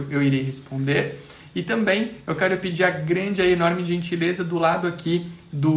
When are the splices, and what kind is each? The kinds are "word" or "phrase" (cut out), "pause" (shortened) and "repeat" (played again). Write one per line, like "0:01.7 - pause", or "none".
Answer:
none